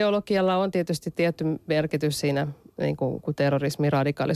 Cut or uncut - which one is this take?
uncut